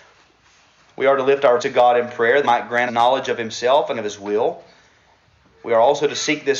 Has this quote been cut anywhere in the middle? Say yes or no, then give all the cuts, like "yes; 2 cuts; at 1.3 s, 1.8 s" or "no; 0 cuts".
yes; 4 cuts; at 1.6 s, 2.4 s, 2.9 s, 3.9 s